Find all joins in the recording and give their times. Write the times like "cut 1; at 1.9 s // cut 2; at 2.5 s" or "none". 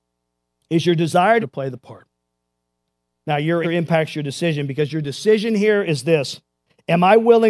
cut 1; at 1.4 s // cut 2; at 3.6 s